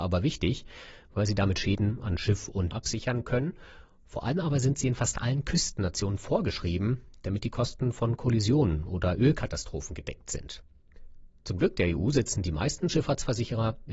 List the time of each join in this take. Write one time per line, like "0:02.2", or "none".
0:02.7